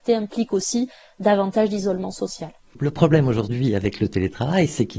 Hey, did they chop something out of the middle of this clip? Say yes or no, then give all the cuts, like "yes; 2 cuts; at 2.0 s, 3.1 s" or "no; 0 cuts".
no; 0 cuts